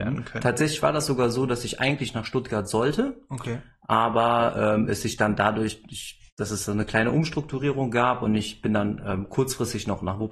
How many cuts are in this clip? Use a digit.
1